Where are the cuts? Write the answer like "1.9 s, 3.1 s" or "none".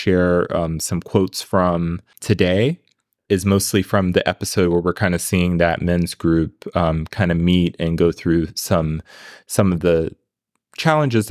none